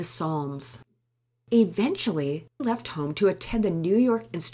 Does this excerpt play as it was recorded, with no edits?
no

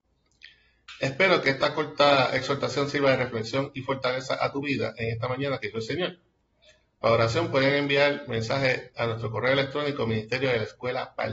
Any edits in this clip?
no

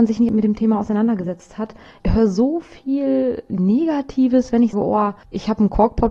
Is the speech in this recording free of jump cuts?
no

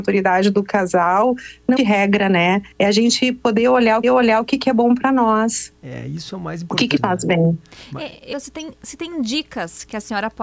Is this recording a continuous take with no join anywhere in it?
no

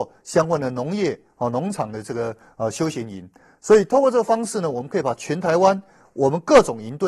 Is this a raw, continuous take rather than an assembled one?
yes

